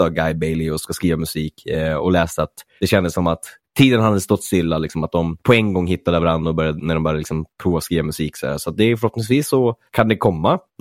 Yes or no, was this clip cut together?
no